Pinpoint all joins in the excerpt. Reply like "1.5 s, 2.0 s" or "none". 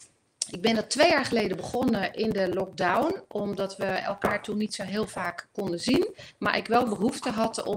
none